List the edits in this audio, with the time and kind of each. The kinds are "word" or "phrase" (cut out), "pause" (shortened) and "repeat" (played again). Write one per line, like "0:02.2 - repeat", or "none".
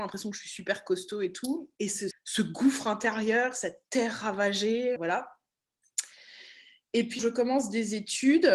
0:01.7 - pause
0:02.1 - word
0:05.0 - word
0:07.2 - word